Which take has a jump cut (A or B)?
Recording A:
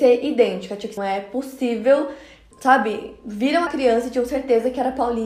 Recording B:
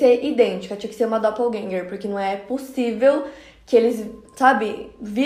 A